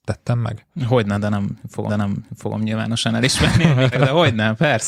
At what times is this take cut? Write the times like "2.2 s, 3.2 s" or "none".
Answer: 1.9 s, 3.9 s